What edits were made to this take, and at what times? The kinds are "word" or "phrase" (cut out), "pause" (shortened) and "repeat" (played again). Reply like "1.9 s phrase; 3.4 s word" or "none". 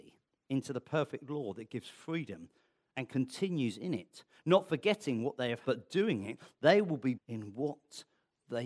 5.6 s word; 7.2 s word